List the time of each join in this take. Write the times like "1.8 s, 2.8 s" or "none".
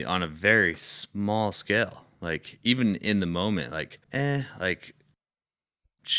4.0 s